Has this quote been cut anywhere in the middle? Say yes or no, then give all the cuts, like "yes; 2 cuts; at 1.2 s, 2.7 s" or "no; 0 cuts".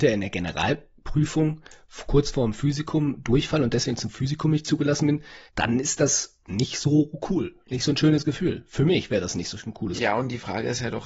yes; 2 cuts; at 5.5 s, 6.4 s